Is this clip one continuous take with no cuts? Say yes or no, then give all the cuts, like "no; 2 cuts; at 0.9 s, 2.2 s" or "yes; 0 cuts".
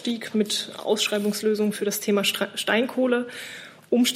yes; 0 cuts